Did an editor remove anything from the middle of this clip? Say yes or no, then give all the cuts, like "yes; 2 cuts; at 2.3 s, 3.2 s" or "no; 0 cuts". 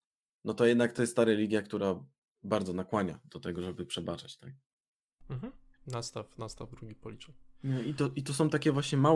no; 0 cuts